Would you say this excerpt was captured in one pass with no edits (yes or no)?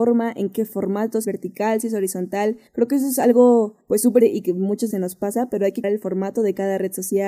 no